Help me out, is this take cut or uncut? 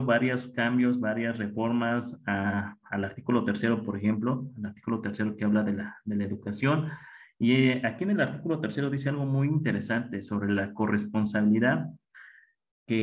uncut